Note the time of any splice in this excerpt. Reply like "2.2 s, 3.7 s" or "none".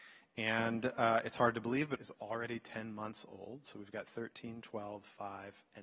2.0 s